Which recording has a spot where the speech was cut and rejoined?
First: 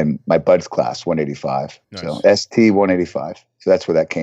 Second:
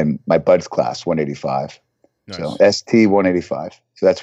first; 1 cut; at 1.8 s

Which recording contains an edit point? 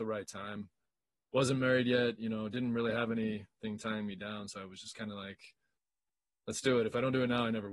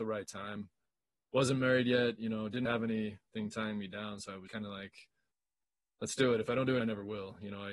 second; 3 cuts; at 2.7 s, 4.5 s, 6.8 s

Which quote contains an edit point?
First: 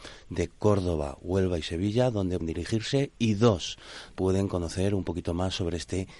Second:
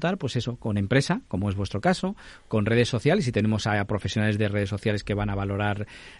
first; 2 cuts; at 2.4 s, 4.1 s

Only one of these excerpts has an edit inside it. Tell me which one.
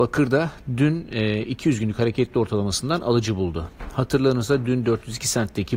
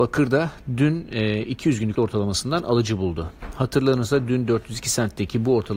second; 1 cut; at 1.9 s

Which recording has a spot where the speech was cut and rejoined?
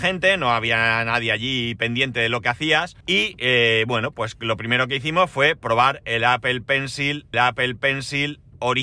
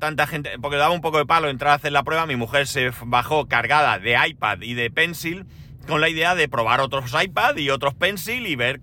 first; 2 cuts; at 3.0 s, 7.3 s

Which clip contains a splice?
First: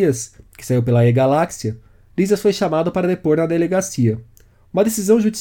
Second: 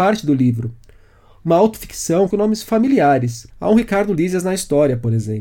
second; 2 cuts; at 2.3 s, 3.5 s

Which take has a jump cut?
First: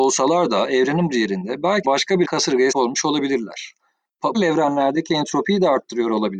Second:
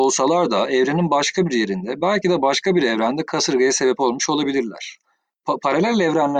first; 5 cuts; at 1.1 s, 1.8 s, 2.2 s, 2.7 s, 4.3 s

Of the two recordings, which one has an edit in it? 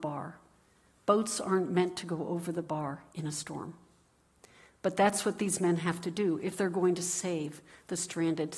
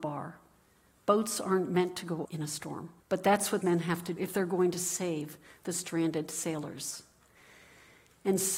second; 4 cuts; at 2.2 s, 3.0 s, 3.6 s, 4.2 s

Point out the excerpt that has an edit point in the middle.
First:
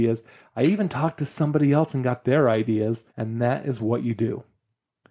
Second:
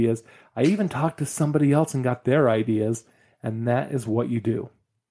first; 1 cut; at 3.1 s

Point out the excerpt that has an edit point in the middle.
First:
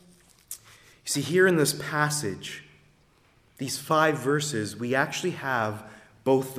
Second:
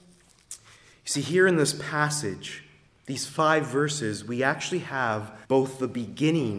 second; 2 cuts; at 2.9 s, 5.4 s

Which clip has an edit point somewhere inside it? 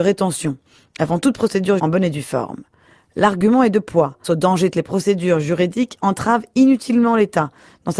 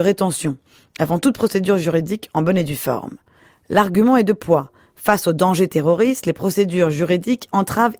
first; 3 cuts; at 1.8 s, 4.2 s, 4.7 s

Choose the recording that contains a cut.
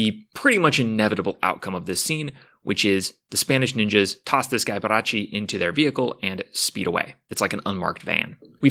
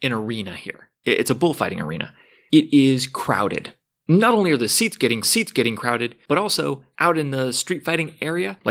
second; 1 cut; at 5.2 s

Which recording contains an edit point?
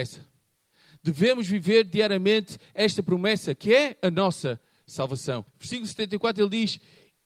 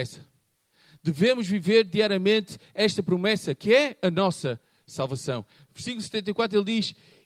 first; 1 cut; at 5.5 s

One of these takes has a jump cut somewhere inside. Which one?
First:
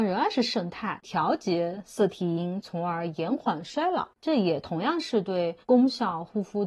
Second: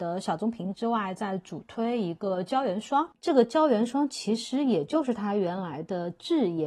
first; 1 cut; at 5.6 s

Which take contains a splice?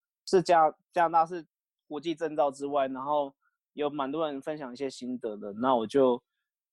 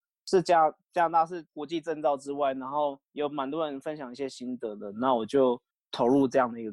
second; 3 cuts; at 1.5 s, 3.0 s, 5.7 s

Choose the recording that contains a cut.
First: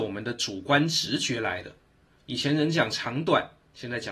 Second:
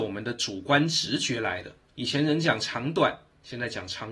second; 1 cut; at 1.9 s

